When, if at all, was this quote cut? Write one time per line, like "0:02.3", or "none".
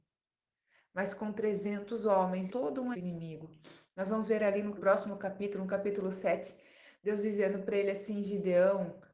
0:02.5
0:02.9
0:04.8